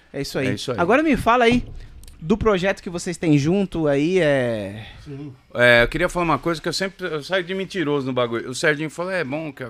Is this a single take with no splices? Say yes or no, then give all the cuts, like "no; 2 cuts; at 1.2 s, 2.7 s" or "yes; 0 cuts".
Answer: yes; 0 cuts